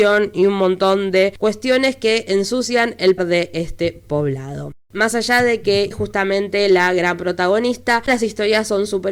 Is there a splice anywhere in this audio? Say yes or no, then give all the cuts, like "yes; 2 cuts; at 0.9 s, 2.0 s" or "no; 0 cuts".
yes; 3 cuts; at 3.2 s, 5.9 s, 8.1 s